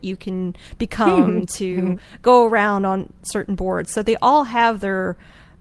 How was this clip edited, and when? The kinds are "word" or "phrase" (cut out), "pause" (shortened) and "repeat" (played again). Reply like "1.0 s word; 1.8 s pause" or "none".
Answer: none